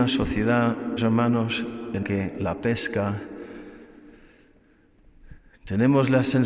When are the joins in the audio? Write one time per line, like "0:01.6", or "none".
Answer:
0:01.0
0:02.0